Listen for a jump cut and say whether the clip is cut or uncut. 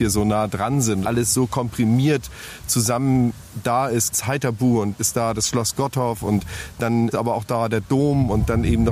cut